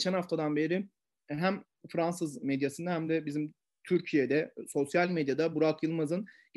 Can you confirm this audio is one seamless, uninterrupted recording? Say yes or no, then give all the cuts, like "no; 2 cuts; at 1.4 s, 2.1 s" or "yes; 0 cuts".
yes; 0 cuts